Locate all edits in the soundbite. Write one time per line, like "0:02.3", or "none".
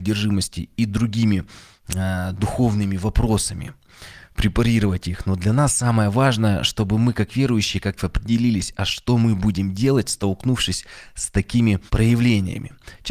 0:08.0
0:11.9